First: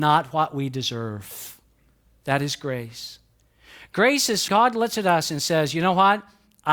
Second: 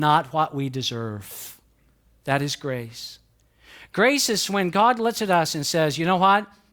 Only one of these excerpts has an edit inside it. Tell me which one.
first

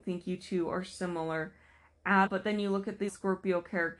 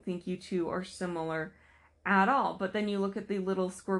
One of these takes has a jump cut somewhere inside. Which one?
first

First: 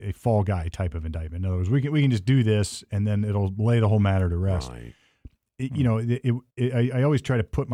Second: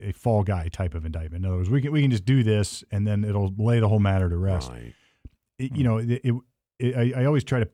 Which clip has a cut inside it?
first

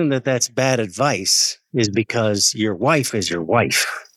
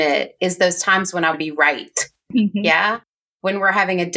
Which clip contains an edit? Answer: second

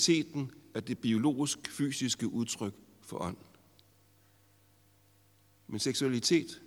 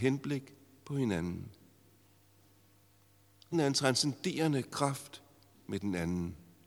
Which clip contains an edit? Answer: second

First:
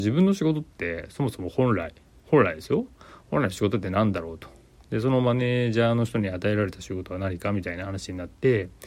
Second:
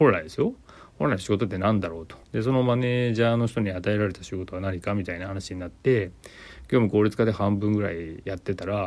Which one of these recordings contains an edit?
second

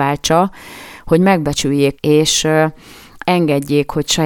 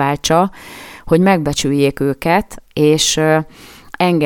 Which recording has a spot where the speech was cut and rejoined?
first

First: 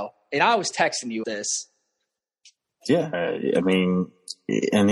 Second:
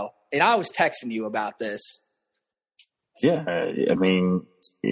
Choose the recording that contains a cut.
first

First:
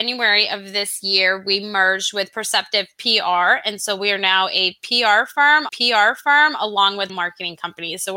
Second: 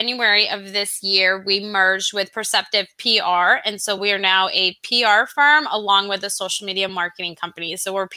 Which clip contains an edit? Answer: first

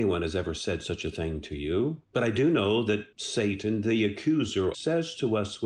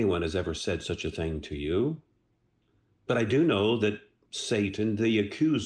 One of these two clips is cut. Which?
first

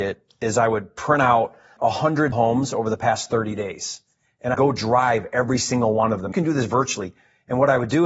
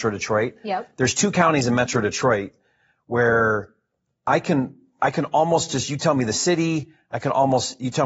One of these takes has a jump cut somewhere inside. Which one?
first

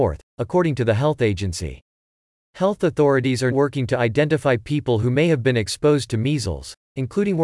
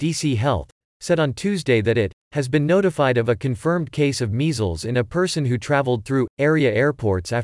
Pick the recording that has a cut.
first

